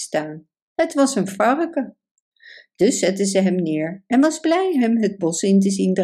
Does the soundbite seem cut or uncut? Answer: uncut